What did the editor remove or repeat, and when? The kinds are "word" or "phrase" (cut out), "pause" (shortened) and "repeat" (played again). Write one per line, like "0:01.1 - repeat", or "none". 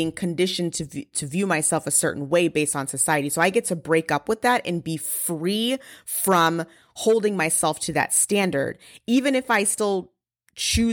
none